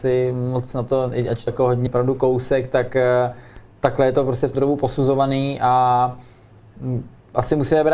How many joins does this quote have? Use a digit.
3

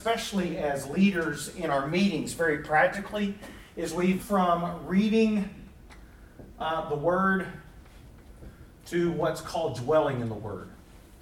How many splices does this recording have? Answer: 1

